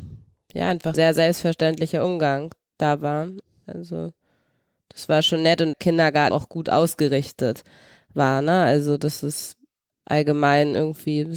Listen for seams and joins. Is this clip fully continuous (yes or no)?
no